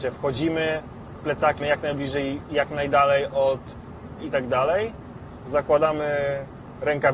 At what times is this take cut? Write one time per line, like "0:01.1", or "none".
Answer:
0:01.2
0:01.6
0:02.4
0:04.2